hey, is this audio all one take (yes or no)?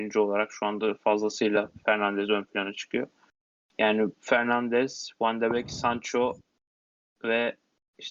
yes